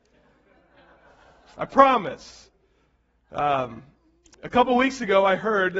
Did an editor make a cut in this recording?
no; 0 cuts

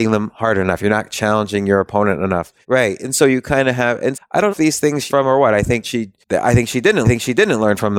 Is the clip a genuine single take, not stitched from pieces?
no; 7 cuts; at 2.6 s, 4.1 s, 4.5 s, 5.1 s, 5.8 s, 6.2 s, 7.0 s

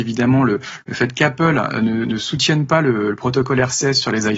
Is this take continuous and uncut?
yes; 0 cuts

